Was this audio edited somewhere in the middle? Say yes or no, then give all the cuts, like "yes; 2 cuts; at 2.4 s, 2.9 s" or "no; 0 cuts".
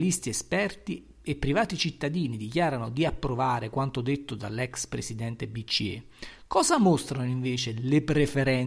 no; 0 cuts